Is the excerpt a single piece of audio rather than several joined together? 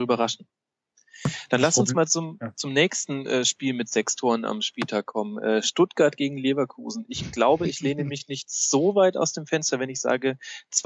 yes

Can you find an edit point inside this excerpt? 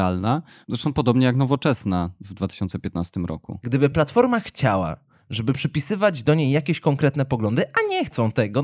no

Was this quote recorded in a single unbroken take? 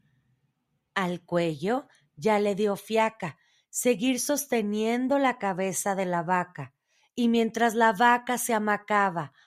yes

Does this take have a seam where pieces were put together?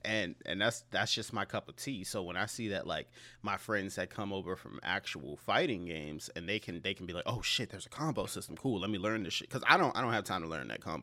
no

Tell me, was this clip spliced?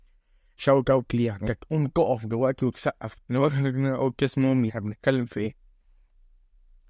yes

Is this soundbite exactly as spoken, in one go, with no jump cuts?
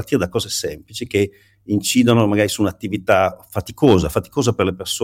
yes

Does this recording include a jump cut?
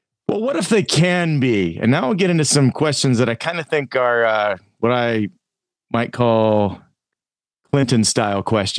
no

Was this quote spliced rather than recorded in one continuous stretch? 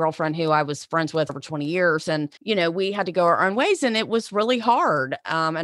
yes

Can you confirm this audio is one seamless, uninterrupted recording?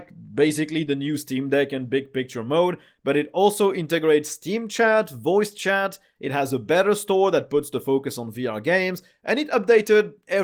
yes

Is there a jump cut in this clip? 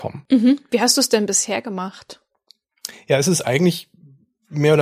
no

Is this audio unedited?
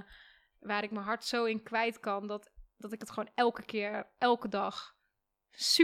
yes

